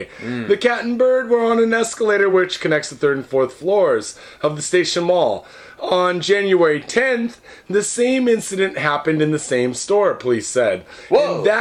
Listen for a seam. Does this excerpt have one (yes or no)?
no